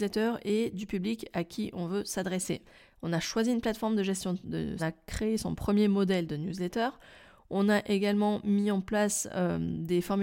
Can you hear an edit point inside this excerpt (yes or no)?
yes